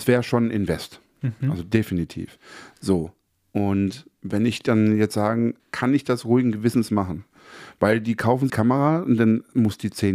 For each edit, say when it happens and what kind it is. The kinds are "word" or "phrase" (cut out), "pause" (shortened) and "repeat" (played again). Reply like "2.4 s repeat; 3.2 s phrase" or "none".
5.6 s word; 8.5 s phrase